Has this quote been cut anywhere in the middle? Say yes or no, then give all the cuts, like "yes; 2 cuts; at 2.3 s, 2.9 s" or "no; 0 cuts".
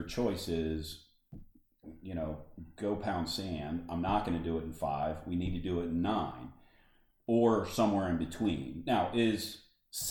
no; 0 cuts